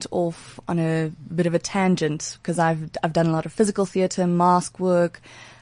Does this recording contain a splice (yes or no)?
no